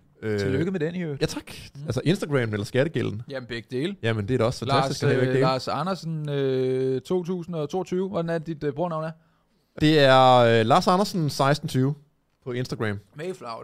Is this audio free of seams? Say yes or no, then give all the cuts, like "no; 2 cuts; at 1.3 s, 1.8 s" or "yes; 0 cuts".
no; 1 cut; at 9.8 s